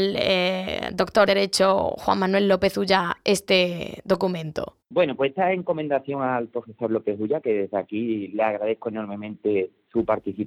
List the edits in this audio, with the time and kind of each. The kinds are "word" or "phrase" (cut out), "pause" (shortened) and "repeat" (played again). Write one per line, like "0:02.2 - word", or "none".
0:01.3 - word
0:04.8 - pause